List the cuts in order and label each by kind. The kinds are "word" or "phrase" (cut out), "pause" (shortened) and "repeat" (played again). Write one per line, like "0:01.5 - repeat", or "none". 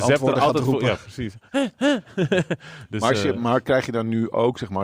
none